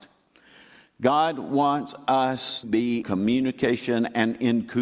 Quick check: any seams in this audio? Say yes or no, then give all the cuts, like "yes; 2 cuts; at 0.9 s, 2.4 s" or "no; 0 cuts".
yes; 2 cuts; at 2.6 s, 3.0 s